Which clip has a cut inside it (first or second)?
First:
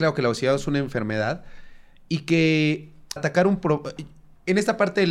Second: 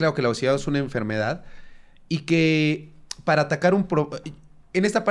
first